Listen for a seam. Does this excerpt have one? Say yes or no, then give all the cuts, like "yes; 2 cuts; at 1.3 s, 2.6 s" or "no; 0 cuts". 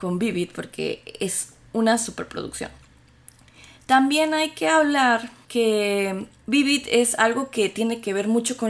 no; 0 cuts